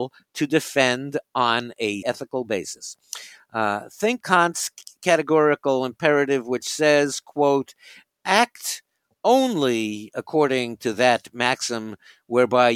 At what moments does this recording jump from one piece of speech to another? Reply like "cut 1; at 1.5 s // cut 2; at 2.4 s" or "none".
cut 1; at 2.0 s // cut 2; at 4.2 s